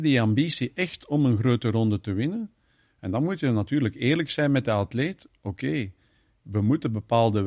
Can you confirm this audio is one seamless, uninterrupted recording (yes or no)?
yes